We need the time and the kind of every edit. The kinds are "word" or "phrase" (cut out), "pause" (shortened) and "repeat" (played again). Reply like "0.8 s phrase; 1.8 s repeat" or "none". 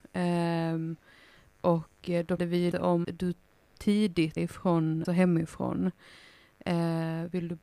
2.4 s word; 2.7 s word; 3.0 s word; 4.4 s word; 5.0 s word